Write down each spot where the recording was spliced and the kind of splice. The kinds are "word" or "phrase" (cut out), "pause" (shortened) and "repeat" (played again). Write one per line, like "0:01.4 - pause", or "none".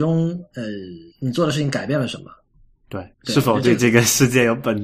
0:01.1 - pause
0:03.1 - pause